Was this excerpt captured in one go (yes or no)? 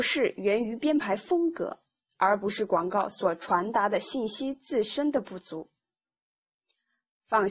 yes